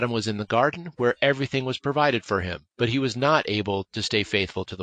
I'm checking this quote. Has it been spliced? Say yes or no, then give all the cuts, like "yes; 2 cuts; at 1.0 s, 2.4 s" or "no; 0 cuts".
yes; 1 cut; at 2.7 s